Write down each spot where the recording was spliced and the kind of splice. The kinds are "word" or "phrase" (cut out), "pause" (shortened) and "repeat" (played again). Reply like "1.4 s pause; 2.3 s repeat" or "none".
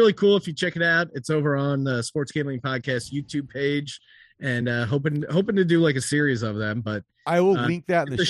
none

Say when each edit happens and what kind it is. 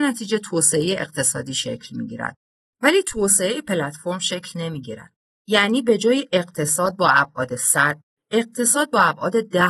none

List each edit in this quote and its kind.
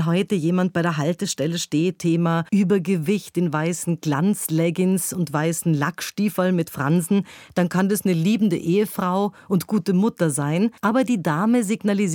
2.0 s word; 2.5 s pause; 10.8 s pause

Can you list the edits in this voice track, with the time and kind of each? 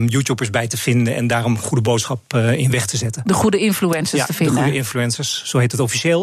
none

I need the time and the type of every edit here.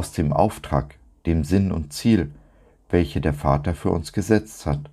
none

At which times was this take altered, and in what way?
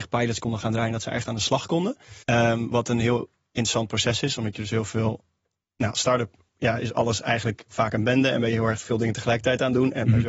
2.2 s pause

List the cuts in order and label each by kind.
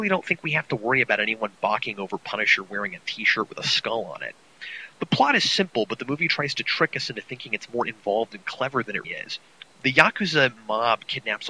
9.0 s word

